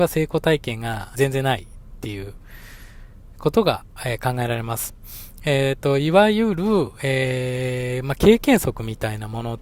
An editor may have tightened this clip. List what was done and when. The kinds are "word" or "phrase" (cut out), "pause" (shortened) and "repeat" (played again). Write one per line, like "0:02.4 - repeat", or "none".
0:01.1 - phrase